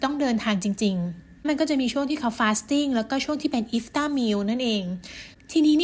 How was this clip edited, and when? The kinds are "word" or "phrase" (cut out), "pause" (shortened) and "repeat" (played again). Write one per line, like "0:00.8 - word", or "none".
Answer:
none